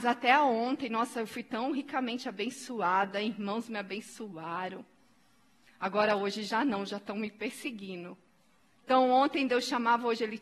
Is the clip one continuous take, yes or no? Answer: yes